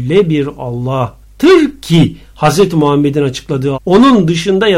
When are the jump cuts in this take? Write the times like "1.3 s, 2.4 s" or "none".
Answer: 1.2 s, 3.7 s